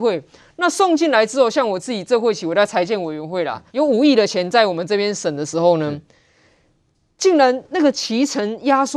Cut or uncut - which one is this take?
cut